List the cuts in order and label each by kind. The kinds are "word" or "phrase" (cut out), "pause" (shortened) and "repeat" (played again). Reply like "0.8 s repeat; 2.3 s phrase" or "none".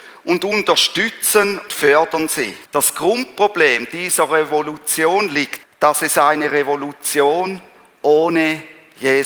1.7 s word; 2.6 s pause; 5.6 s word